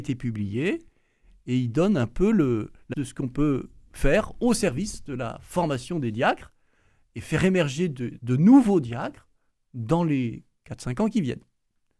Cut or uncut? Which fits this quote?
cut